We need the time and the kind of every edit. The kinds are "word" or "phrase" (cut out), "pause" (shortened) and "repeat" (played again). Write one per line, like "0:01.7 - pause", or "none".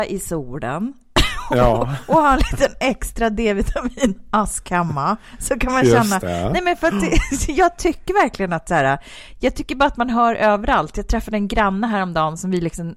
none